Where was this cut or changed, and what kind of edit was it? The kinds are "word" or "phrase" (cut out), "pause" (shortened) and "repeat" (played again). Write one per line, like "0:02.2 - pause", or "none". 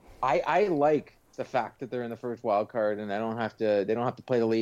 0:01.3 - pause